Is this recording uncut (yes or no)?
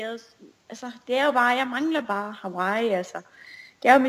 yes